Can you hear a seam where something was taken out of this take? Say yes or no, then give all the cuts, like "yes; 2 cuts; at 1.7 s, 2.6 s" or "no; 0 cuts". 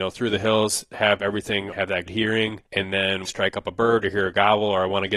yes; 4 cuts; at 1.7 s, 2.1 s, 2.7 s, 3.3 s